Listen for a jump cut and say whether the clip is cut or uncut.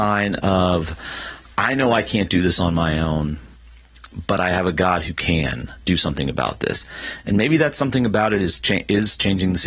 uncut